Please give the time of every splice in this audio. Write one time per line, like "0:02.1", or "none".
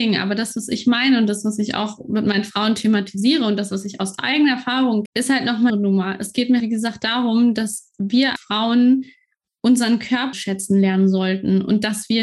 0:05.1
0:05.7
0:06.6
0:08.4
0:10.3